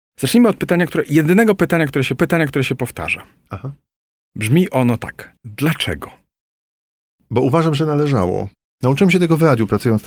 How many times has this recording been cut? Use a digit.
3